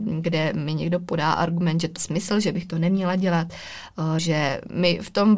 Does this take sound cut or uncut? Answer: cut